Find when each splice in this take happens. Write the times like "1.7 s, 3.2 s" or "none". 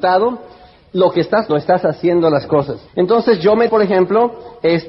1.5 s, 2.9 s, 3.7 s